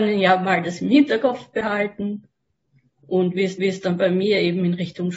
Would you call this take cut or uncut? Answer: cut